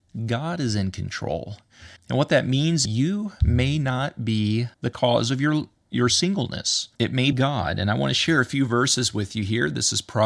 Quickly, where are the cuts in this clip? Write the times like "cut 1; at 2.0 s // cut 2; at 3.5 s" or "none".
cut 1; at 2.0 s // cut 2; at 2.9 s // cut 3; at 4.7 s // cut 4; at 6.9 s // cut 5; at 7.3 s